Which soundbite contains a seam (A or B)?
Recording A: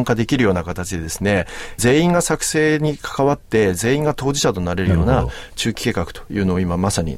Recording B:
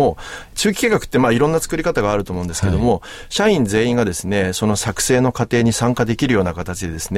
A